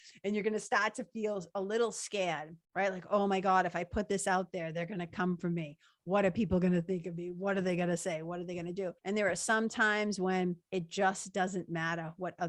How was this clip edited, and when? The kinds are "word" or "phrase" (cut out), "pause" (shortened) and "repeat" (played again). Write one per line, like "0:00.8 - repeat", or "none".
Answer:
0:02.6 - pause
0:09.0 - pause
0:10.6 - pause